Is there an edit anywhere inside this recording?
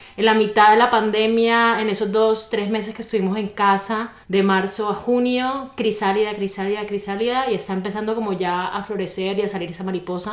yes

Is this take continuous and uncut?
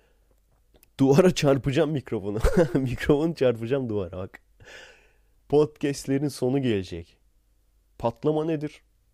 yes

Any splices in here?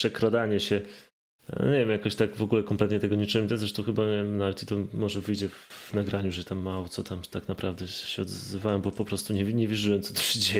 no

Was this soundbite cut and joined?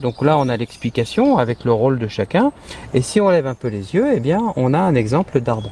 no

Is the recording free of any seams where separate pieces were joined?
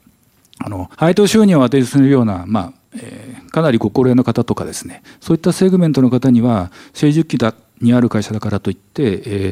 no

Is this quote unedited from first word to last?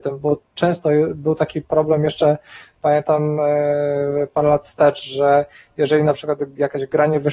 yes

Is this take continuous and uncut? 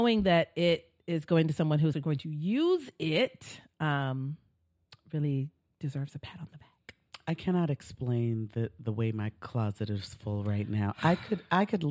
no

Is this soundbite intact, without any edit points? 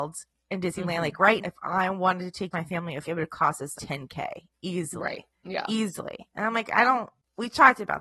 no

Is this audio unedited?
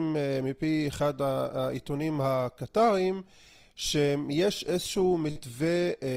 yes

